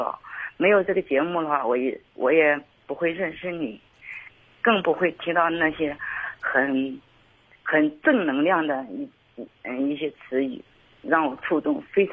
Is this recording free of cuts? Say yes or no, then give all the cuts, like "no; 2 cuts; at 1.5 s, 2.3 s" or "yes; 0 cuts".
yes; 0 cuts